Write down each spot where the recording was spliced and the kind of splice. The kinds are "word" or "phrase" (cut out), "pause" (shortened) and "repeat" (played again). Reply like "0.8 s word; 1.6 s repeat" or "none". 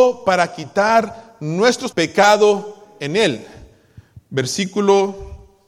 1.9 s phrase